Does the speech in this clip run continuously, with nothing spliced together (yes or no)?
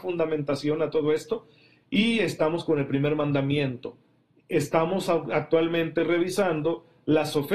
yes